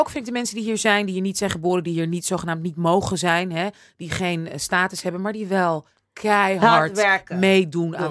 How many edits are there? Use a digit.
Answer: 0